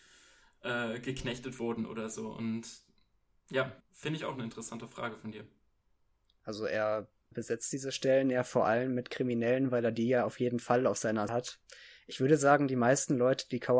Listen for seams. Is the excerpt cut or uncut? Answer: cut